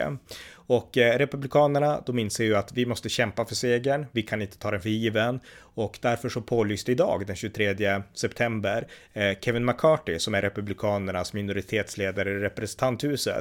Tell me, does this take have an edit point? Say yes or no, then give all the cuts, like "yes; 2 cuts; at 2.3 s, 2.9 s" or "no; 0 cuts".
no; 0 cuts